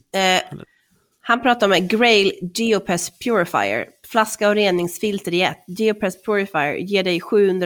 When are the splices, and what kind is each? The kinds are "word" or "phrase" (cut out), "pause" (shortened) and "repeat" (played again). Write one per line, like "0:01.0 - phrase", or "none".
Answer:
none